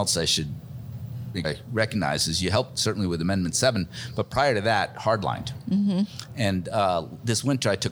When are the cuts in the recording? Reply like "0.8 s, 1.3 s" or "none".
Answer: 1.4 s